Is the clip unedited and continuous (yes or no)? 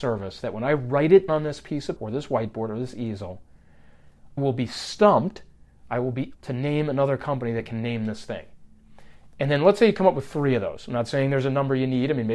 no